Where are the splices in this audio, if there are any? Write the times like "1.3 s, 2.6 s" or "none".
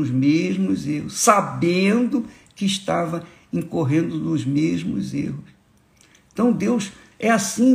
none